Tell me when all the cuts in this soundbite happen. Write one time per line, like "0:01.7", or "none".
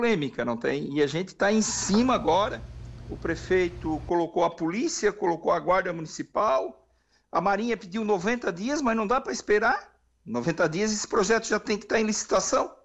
none